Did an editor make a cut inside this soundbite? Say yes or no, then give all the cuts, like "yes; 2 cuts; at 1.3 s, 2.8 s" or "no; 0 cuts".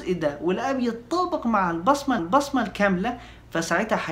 yes; 1 cut; at 2.2 s